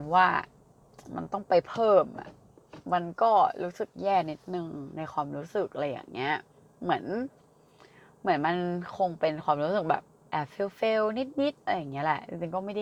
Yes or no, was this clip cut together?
no